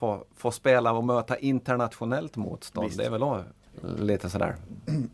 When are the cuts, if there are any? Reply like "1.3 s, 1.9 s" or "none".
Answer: none